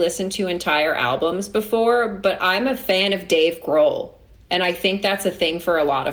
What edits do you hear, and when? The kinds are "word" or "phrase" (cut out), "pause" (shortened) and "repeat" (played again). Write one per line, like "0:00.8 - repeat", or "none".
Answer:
none